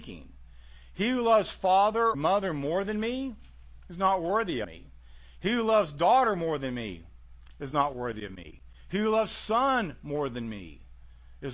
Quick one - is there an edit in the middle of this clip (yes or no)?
yes